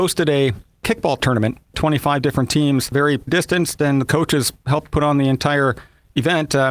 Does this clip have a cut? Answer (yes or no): yes